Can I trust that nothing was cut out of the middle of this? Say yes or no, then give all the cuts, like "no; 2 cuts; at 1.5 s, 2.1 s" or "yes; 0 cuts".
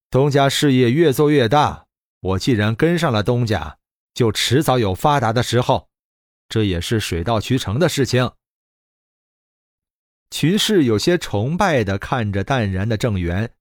yes; 0 cuts